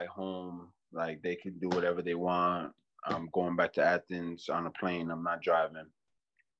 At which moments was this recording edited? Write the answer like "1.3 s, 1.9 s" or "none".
none

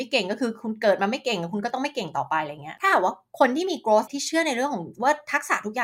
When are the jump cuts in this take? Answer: 4.1 s

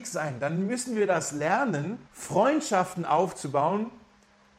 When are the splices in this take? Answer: 2.1 s

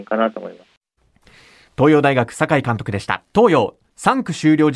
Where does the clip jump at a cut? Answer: 3.3 s

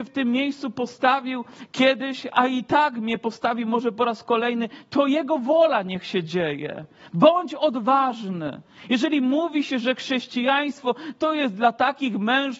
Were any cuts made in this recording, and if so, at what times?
none

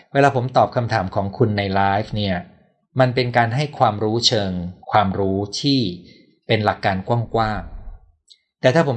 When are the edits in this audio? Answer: 4.8 s

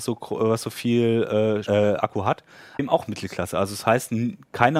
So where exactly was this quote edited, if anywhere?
1.7 s, 2.8 s

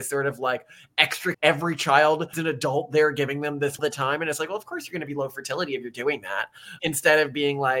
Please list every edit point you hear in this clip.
1.3 s, 2.3 s, 3.8 s

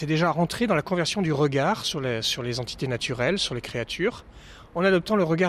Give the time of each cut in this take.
none

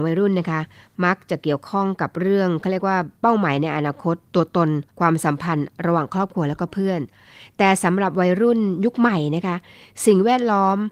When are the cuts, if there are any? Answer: 3.1 s, 4.3 s, 4.9 s

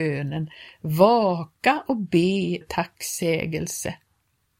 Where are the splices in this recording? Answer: 2.6 s

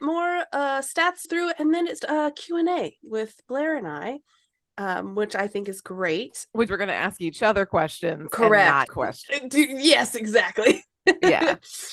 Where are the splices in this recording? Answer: 1.2 s, 2.0 s, 6.7 s, 8.9 s

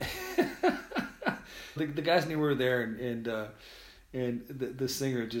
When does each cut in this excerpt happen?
1.8 s

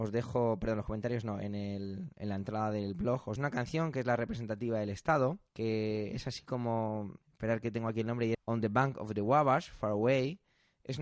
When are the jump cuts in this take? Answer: 3.4 s, 5.5 s, 7.2 s, 8.3 s

